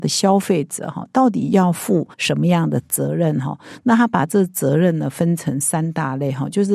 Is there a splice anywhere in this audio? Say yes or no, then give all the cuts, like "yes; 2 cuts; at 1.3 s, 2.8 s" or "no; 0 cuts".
yes; 1 cut; at 2.1 s